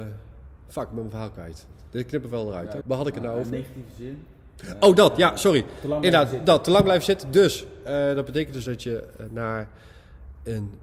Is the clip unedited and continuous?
no; 1 cut; at 2.8 s

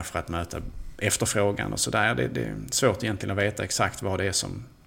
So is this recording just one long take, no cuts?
yes; 0 cuts

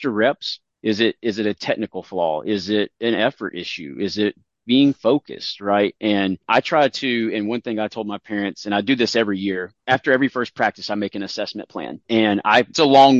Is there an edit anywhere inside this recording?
no; 0 cuts

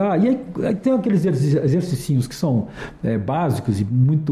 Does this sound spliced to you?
no; 0 cuts

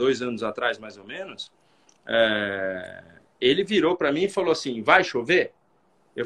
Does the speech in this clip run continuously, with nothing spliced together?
yes; 0 cuts

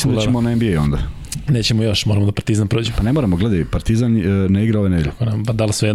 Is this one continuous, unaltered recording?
yes; 0 cuts

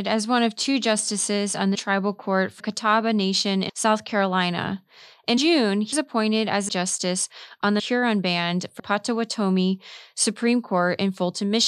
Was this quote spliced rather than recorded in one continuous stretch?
yes; 8 cuts; at 1.7 s, 2.6 s, 3.7 s, 5.4 s, 5.9 s, 6.7 s, 7.8 s, 8.8 s

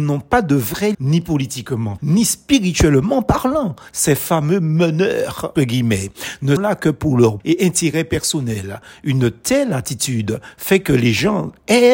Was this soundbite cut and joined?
yes; 5 cuts; at 0.9 s, 2.0 s, 5.6 s, 6.6 s, 7.4 s

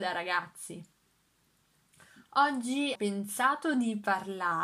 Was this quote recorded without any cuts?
no; 1 cut; at 3.0 s

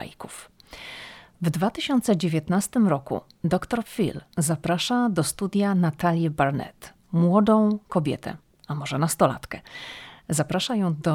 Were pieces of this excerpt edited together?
no; 0 cuts

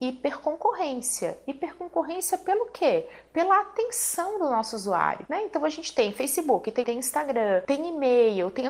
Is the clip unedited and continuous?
no; 1 cut; at 6.8 s

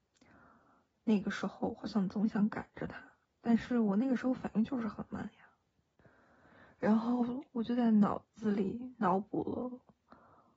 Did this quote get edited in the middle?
yes; 1 cut; at 3.2 s

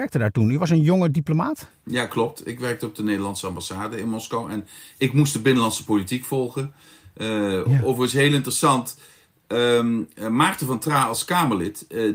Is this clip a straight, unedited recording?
yes; 0 cuts

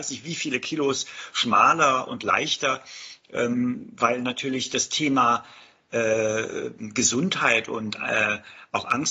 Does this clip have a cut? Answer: no; 0 cuts

